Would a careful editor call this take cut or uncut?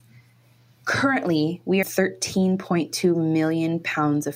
cut